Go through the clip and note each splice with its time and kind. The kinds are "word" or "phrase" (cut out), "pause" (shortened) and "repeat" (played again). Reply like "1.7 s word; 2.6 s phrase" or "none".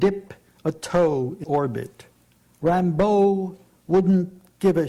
1.4 s word; 2.4 s pause